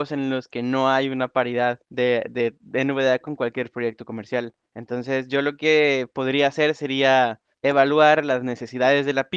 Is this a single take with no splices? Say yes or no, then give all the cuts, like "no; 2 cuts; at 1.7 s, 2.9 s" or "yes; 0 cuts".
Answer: no; 3 cuts; at 1.8 s, 4.7 s, 7.5 s